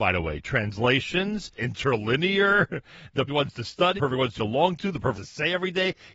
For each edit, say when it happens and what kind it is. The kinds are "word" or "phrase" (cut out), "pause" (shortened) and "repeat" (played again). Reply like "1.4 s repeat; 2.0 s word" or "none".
1.6 s word; 3.3 s word; 4.0 s word; 4.4 s word; 5.1 s word